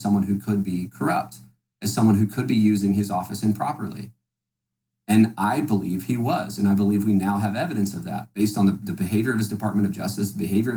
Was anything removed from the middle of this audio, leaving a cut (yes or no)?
no